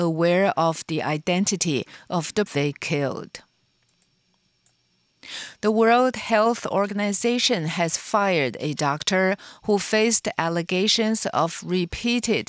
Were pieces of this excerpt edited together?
yes; 1 cut; at 2.5 s

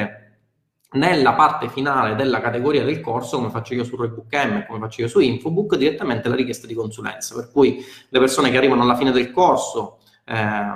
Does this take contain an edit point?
no; 0 cuts

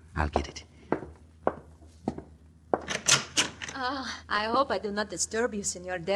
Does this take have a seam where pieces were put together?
yes; 1 cut; at 4.2 s

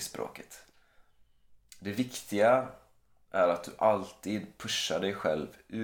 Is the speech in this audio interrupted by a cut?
no; 0 cuts

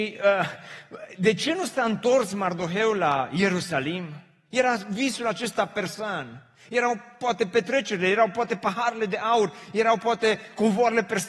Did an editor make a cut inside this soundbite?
no; 0 cuts

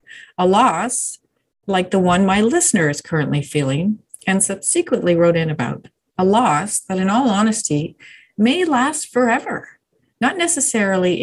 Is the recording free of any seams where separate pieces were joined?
yes; 0 cuts

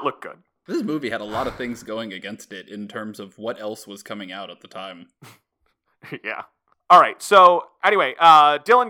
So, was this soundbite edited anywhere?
no; 0 cuts

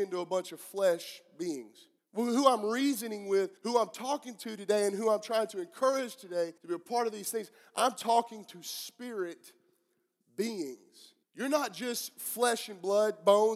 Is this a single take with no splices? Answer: no; 4 cuts; at 2.0 s, 3.6 s, 6.6 s, 11.2 s

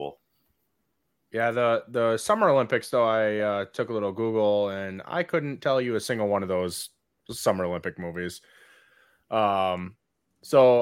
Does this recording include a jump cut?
no; 0 cuts

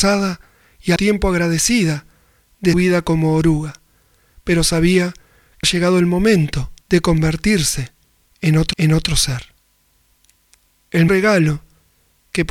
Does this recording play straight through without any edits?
no; 6 cuts; at 1.0 s, 2.7 s, 5.6 s, 6.8 s, 8.7 s, 11.1 s

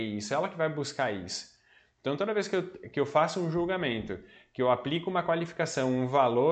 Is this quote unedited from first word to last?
yes; 0 cuts

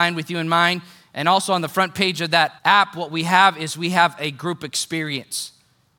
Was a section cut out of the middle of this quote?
yes; 1 cut; at 2.6 s

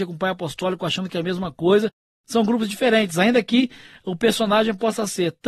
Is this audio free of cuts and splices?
yes; 0 cuts

